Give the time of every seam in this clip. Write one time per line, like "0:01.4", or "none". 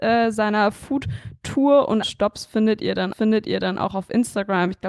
0:02.0
0:03.1